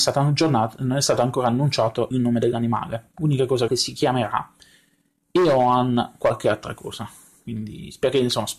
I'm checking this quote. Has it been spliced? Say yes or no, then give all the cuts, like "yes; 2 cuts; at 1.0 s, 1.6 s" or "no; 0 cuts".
yes; 2 cuts; at 2.1 s, 3.7 s